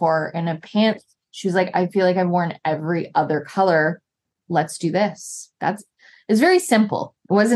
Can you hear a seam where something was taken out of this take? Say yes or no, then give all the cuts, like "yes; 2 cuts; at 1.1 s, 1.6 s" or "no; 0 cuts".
yes; 1 cut; at 5.6 s